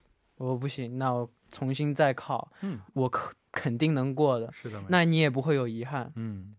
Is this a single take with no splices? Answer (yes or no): no